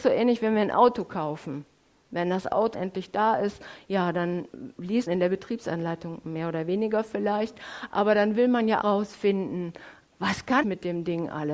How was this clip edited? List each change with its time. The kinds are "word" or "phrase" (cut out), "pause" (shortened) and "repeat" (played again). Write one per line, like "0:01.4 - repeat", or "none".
0:02.7 - word
0:05.1 - word
0:08.8 - word
0:10.1 - word
0:10.6 - word